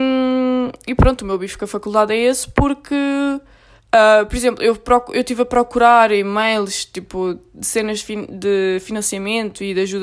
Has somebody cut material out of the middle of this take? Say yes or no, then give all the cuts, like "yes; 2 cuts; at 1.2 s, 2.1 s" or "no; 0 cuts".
no; 0 cuts